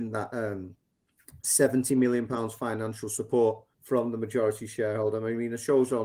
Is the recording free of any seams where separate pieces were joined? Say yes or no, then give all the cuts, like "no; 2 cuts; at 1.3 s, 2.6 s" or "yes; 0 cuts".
no; 1 cut; at 3.7 s